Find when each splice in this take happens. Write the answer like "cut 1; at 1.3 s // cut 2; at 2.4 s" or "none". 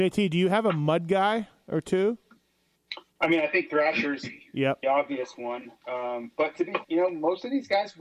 cut 1; at 3.1 s // cut 2; at 4.8 s // cut 3; at 6.8 s